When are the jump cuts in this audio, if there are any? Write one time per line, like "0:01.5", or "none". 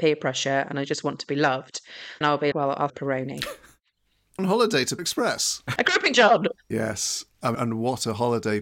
0:02.2
0:02.5
0:02.9
0:04.4
0:05.0
0:05.8
0:06.1
0:07.5